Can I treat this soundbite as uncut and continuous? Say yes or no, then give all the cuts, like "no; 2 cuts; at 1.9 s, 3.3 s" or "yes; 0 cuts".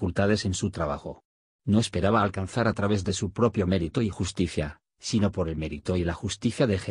yes; 0 cuts